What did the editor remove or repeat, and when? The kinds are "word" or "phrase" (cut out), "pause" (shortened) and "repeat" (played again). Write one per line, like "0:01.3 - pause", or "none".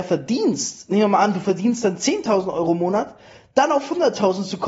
none